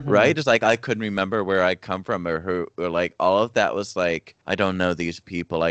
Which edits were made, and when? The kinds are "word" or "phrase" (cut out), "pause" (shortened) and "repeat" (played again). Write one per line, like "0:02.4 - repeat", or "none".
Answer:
0:04.4 - pause